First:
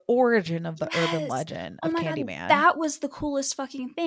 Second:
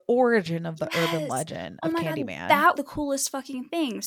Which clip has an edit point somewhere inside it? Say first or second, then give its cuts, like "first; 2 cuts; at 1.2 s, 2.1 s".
second; 1 cut; at 2.7 s